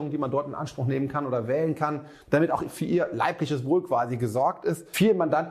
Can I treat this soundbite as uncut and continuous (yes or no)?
no